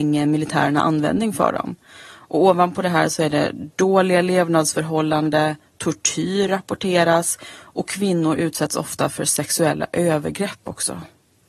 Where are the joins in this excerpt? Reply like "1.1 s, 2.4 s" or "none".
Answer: none